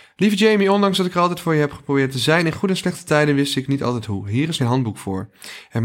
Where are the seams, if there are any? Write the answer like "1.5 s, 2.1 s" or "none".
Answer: 4.6 s